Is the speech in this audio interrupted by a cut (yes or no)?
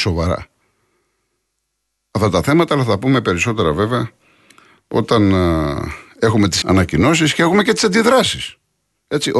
yes